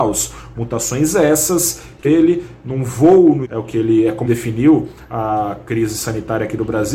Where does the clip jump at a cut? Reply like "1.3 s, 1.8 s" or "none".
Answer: 2.0 s, 3.4 s, 4.3 s